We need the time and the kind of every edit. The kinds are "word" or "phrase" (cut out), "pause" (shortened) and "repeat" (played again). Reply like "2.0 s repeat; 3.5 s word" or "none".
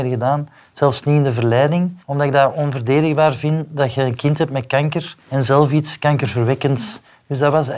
2.0 s pause; 5.2 s pause